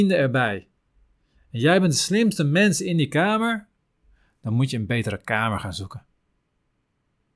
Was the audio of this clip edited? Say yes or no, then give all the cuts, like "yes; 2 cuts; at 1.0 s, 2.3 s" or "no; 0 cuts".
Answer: no; 0 cuts